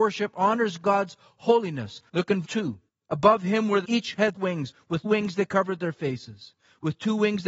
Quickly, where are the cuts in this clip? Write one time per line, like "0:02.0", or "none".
0:02.1
0:02.4
0:02.9
0:03.8
0:04.3
0:05.0